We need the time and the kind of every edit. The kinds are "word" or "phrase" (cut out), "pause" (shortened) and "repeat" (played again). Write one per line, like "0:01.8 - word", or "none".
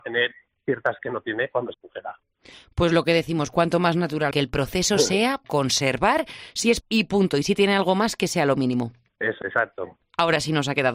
0:01.0 - word
0:01.7 - word
0:04.3 - word
0:05.4 - word
0:06.8 - word
0:09.4 - word